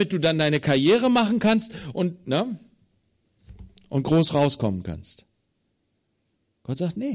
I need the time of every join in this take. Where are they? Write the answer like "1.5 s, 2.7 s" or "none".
none